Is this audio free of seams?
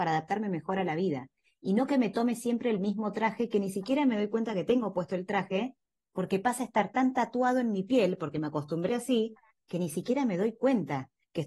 no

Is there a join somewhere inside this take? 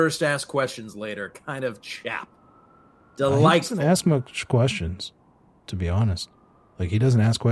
no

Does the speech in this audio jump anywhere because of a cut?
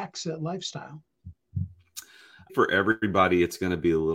yes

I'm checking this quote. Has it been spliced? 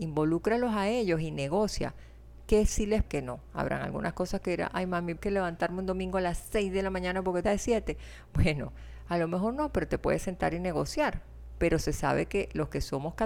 yes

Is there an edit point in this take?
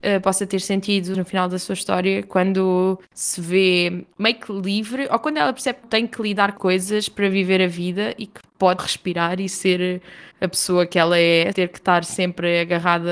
yes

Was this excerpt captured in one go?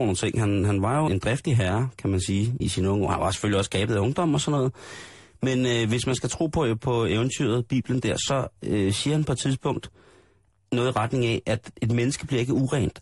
no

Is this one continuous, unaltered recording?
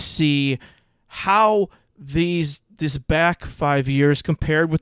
yes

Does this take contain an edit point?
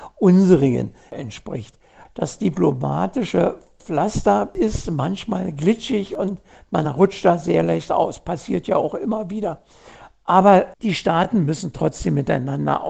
no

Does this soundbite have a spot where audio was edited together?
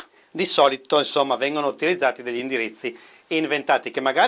no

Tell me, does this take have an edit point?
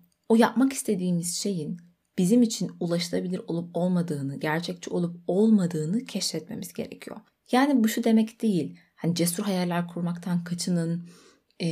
no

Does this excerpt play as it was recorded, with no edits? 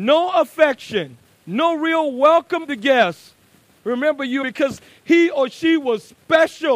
no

